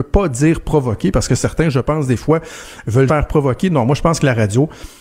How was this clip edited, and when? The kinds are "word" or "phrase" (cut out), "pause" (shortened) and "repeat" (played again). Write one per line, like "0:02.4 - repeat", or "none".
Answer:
0:03.1 - word